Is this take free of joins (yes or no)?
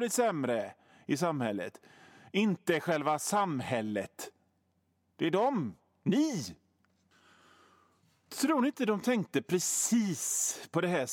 yes